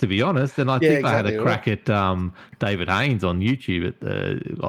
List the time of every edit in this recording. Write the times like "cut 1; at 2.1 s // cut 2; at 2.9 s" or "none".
none